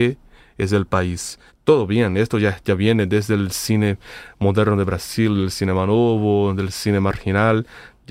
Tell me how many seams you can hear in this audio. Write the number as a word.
one